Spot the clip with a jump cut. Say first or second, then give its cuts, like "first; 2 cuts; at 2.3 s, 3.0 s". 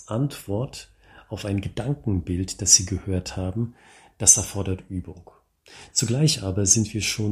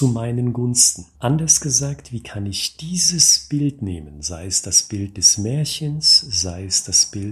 second; 1 cut; at 1.1 s